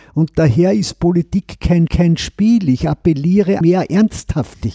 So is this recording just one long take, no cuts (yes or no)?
no